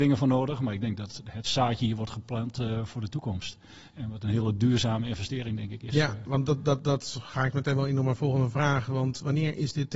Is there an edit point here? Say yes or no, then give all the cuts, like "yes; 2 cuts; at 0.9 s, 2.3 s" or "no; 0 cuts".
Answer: no; 0 cuts